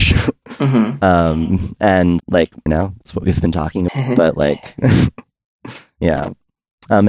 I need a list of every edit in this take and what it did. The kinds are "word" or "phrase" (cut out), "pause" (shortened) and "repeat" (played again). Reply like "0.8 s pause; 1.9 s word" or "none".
2.2 s word; 2.7 s phrase; 3.9 s word